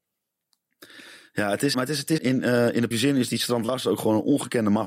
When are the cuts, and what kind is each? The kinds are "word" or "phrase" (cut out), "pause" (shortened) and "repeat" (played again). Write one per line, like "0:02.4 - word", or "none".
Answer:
0:01.7 - word
0:02.2 - word
0:02.9 - word